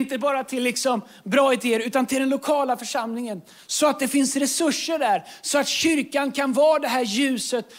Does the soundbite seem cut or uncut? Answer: uncut